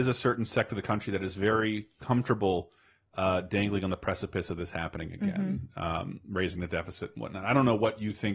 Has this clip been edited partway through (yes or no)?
no